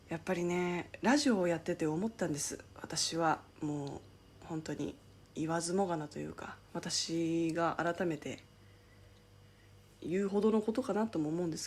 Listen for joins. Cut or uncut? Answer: cut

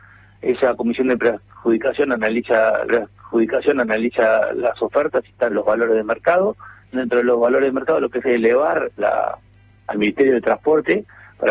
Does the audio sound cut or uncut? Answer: cut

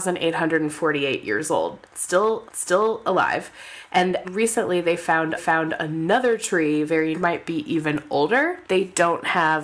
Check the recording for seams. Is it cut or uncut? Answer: cut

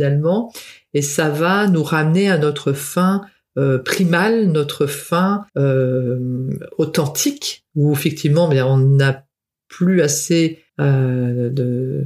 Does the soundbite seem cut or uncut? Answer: cut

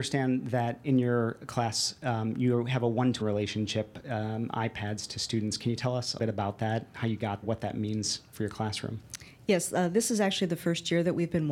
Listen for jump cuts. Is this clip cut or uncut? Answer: cut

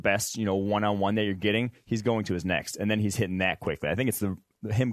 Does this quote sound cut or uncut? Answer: uncut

